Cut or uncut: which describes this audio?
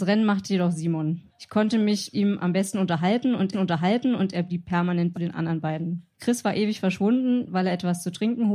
cut